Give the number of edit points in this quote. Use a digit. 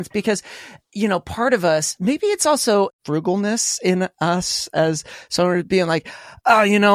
1